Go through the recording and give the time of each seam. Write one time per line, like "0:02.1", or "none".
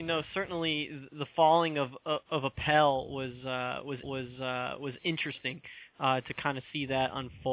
0:04.0